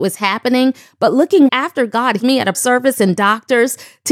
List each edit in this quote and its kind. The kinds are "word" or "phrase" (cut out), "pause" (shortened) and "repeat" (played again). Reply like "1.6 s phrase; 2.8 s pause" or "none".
1.5 s word; 2.2 s word; 2.5 s word; 3.2 s word